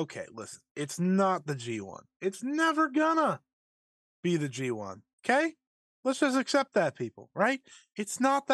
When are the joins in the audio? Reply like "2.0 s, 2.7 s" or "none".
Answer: none